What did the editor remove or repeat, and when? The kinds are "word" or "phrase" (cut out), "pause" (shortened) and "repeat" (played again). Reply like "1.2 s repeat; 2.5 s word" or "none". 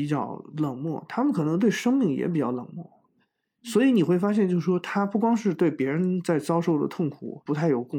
none